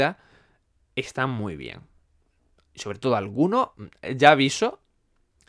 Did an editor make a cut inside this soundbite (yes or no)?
no